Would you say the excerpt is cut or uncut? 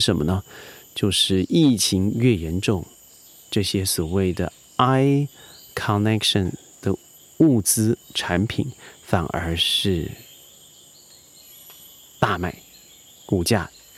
uncut